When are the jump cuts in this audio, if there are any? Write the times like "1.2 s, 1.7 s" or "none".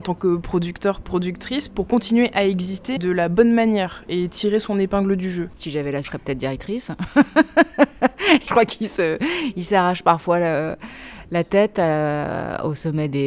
3.0 s, 6.0 s, 8.5 s

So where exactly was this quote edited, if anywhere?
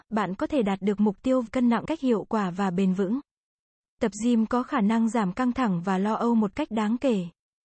1.5 s, 1.9 s

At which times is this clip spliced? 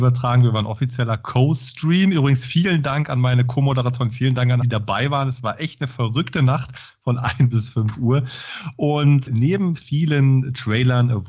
4.6 s, 9.3 s

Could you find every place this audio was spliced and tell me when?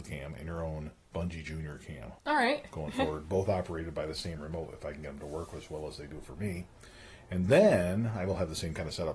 2.2 s

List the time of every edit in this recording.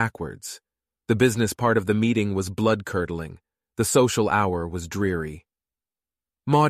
none

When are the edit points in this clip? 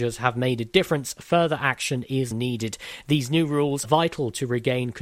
2.3 s, 3.8 s

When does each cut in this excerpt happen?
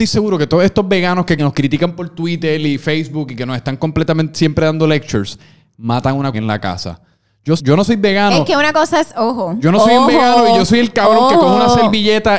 1.4 s, 6.3 s, 7.6 s

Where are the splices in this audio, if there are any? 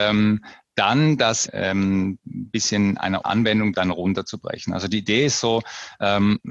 1.5 s, 3.2 s, 3.7 s

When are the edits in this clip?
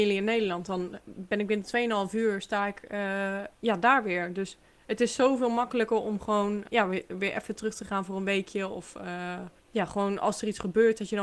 3.6 s, 4.6 s, 6.7 s, 9.6 s

